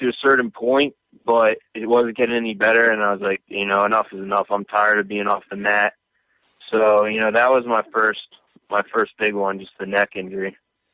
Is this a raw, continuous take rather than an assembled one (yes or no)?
yes